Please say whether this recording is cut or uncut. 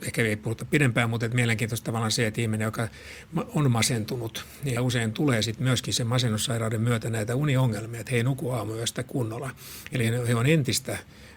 cut